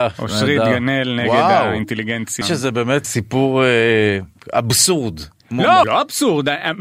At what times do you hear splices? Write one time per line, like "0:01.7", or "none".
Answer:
0:02.4
0:03.0
0:05.8